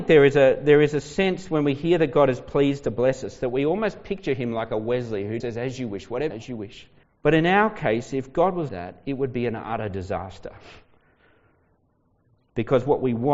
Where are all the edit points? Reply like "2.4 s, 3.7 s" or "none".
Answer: 5.4 s, 6.3 s, 7.0 s, 8.7 s